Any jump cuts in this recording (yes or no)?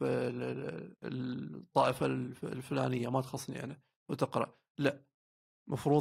yes